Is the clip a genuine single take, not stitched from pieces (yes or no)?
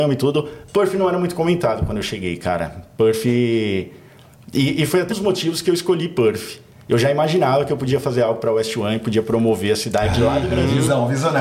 no